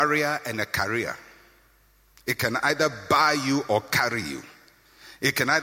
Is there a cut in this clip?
no; 0 cuts

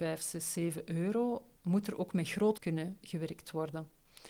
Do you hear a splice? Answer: yes; 2 cuts; at 1.6 s, 2.6 s

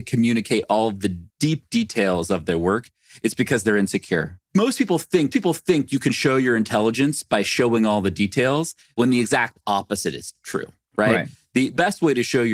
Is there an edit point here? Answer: yes; 2 cuts; at 1.3 s, 5.3 s

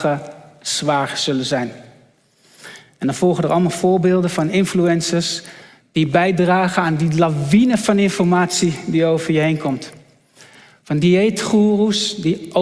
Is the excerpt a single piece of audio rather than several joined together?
yes; 0 cuts

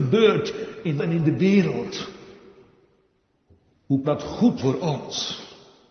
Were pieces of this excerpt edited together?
yes; 3 cuts; at 1.0 s, 4.0 s, 4.6 s

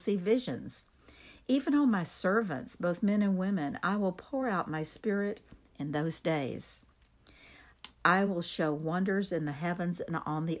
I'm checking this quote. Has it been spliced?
no; 0 cuts

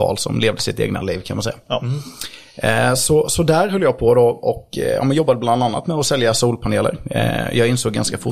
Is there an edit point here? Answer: no; 0 cuts

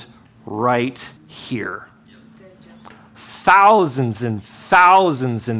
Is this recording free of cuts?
no; 1 cut; at 1.2 s

